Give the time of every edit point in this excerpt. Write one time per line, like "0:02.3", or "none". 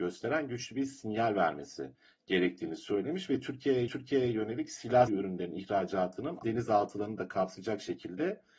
0:02.0
0:03.9
0:05.1
0:06.4